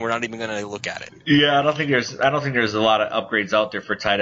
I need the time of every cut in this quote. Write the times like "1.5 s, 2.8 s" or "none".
none